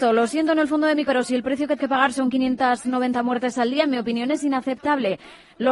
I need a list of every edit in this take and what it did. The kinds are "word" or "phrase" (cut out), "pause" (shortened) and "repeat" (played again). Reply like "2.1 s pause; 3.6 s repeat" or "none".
1.1 s word; 1.8 s word